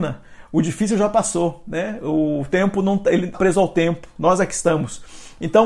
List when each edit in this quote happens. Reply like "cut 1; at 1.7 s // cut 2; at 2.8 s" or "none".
cut 1; at 3.3 s

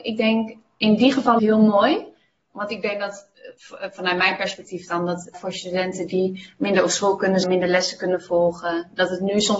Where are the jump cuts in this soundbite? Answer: cut 1; at 1.4 s // cut 2; at 5.3 s // cut 3; at 7.4 s

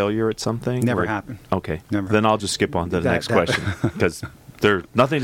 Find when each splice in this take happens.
none

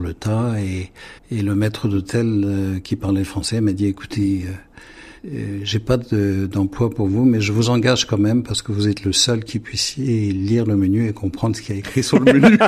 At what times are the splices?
cut 1; at 1.2 s // cut 2; at 5.2 s

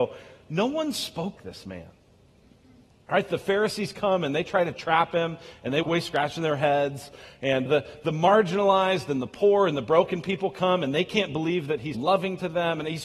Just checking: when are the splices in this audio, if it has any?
cut 1; at 1.4 s // cut 2; at 5.8 s // cut 3; at 7.7 s // cut 4; at 11.9 s

